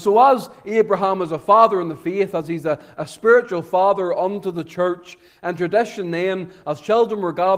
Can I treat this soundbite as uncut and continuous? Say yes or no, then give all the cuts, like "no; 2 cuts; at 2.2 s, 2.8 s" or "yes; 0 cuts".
yes; 0 cuts